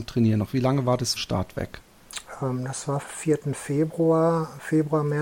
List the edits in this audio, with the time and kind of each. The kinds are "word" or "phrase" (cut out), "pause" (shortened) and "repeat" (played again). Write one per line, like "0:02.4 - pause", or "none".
0:01.2 - word
0:03.0 - word